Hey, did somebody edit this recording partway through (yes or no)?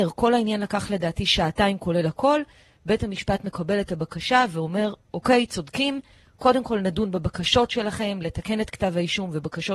no